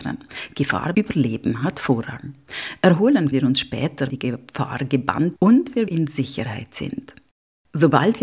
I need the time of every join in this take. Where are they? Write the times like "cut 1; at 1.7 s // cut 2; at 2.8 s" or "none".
cut 1; at 0.9 s // cut 2; at 3.3 s // cut 3; at 4.1 s // cut 4; at 5.4 s // cut 5; at 5.9 s